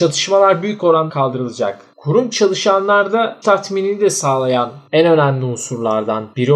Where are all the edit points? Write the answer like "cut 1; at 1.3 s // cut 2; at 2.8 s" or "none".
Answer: cut 1; at 1.1 s // cut 2; at 2.3 s // cut 3; at 3.4 s